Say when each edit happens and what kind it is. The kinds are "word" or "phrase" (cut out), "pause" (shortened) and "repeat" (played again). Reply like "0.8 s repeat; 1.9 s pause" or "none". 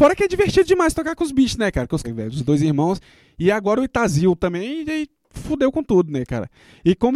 2.0 s phrase